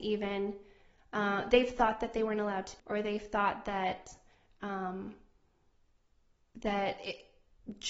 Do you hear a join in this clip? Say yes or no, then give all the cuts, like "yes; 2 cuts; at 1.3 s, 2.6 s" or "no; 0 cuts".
yes; 1 cut; at 2.8 s